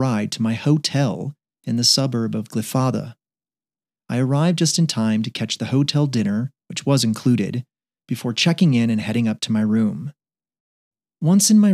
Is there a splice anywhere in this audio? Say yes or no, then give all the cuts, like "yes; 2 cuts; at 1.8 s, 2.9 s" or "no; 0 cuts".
no; 0 cuts